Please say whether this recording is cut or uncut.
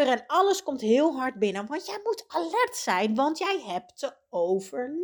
uncut